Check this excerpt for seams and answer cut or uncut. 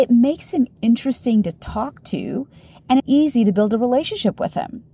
cut